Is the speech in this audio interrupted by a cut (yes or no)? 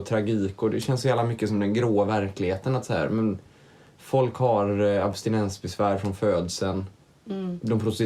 no